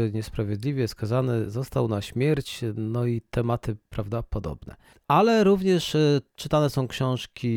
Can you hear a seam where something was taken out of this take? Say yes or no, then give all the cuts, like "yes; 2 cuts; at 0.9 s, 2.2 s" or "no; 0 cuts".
no; 0 cuts